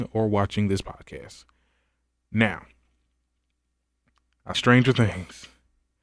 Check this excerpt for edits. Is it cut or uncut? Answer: cut